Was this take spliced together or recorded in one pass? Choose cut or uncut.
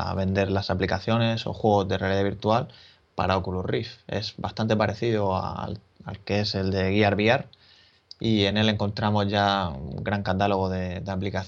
uncut